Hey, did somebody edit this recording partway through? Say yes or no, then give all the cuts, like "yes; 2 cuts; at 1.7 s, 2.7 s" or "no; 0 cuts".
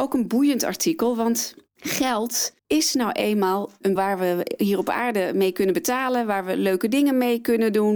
yes; 2 cuts; at 2.6 s, 4.0 s